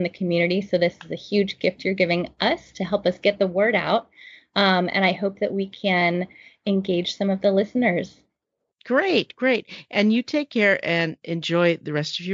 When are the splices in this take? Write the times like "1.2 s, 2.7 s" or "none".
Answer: none